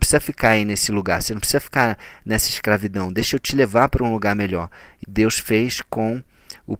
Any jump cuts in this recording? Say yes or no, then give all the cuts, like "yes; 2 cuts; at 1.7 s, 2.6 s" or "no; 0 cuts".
yes; 1 cut; at 5.0 s